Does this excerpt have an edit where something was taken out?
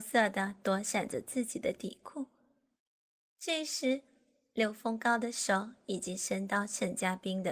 no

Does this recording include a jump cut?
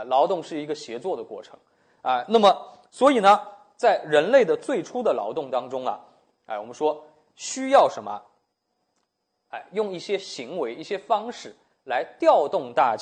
no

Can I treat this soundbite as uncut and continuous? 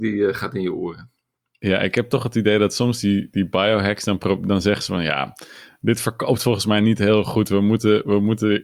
yes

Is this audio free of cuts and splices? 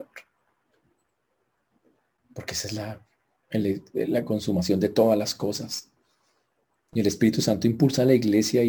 yes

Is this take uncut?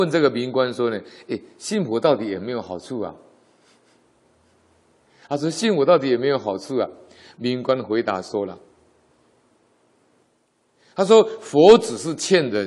yes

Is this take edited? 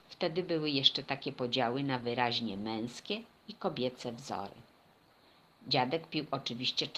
no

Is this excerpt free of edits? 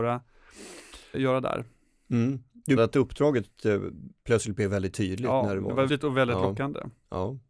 no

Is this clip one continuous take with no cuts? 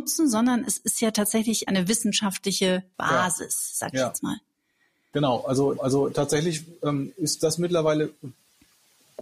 no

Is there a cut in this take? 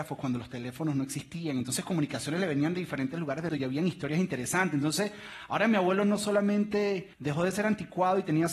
yes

